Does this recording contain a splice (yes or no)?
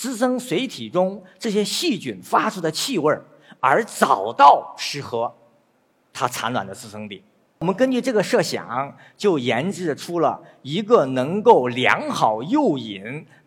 no